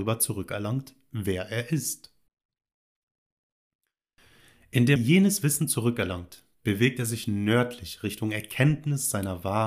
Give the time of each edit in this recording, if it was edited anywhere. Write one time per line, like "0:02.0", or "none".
0:05.0